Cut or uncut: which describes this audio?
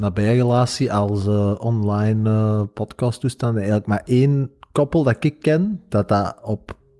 uncut